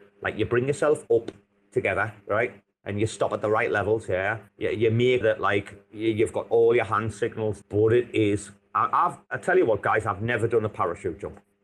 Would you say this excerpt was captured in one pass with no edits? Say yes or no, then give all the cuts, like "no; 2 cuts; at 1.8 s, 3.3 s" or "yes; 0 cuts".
no; 4 cuts; at 2.2 s, 4.5 s, 5.2 s, 7.6 s